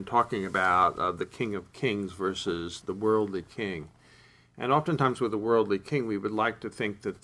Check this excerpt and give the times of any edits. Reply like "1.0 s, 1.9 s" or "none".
2.8 s